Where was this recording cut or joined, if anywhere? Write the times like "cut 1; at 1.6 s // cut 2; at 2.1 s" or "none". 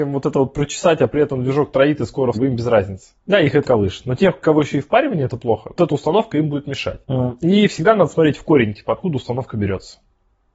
cut 1; at 2.3 s // cut 2; at 3.2 s // cut 3; at 3.6 s // cut 4; at 4.4 s // cut 5; at 5.8 s // cut 6; at 7.0 s